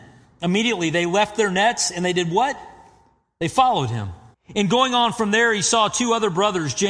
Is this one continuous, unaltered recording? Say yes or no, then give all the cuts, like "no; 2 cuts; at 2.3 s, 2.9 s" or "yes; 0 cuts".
no; 1 cut; at 4.3 s